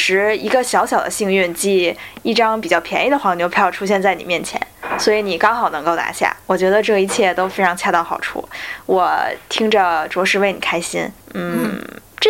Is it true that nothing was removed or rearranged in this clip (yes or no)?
yes